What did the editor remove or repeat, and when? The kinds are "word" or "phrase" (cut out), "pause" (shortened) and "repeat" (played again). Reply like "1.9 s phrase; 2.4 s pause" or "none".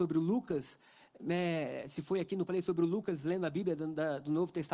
2.5 s phrase